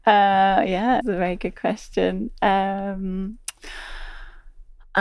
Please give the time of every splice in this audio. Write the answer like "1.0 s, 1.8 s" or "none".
1.0 s